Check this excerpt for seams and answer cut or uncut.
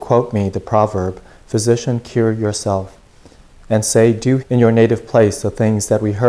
cut